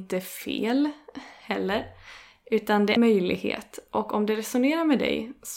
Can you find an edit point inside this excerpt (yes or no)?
yes